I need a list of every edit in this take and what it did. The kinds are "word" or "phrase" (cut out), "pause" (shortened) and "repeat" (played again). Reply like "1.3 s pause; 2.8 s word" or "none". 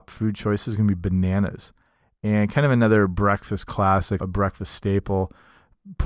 4.2 s word